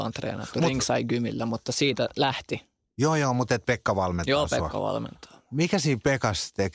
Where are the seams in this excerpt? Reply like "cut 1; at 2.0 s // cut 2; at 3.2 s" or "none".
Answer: none